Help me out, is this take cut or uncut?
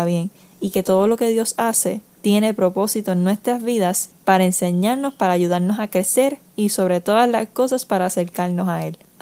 uncut